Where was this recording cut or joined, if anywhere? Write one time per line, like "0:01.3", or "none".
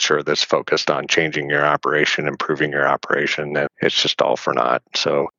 0:03.7